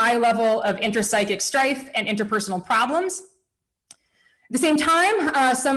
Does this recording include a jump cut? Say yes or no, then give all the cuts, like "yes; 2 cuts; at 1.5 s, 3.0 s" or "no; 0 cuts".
no; 0 cuts